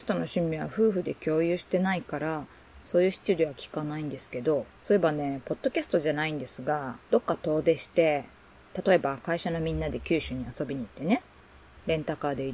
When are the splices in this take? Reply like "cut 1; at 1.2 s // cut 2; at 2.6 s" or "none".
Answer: cut 1; at 4.8 s // cut 2; at 7.0 s